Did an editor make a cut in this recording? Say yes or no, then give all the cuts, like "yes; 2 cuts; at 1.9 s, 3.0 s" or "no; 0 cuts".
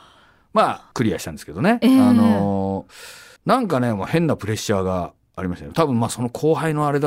yes; 2 cuts; at 0.9 s, 3.4 s